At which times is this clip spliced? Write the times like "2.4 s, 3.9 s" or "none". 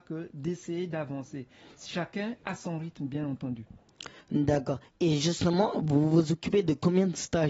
none